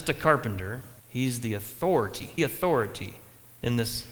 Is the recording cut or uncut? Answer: cut